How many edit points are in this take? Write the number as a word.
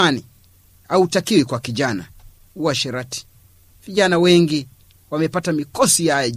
zero